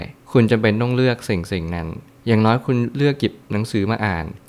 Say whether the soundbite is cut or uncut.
uncut